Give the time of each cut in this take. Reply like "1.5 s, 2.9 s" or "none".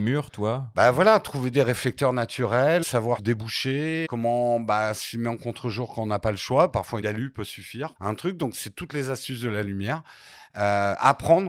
2.8 s, 3.2 s, 4.0 s, 7.0 s, 8.0 s